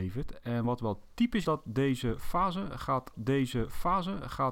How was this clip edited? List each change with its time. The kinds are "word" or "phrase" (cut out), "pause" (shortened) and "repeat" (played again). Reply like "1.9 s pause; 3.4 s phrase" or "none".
1.4 s word; 3.1 s repeat